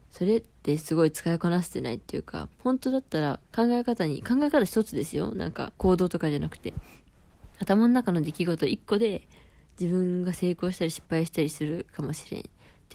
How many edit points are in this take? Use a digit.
4